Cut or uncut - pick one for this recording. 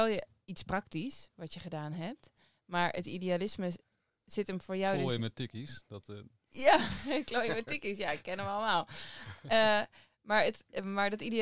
uncut